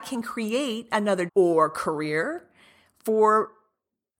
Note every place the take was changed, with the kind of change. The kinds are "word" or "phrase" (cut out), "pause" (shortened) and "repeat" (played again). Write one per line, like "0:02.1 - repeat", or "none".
0:01.3 - phrase